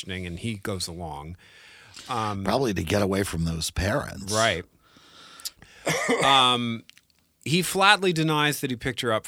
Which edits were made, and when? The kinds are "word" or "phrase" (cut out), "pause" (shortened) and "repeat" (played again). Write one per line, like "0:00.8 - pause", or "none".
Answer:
none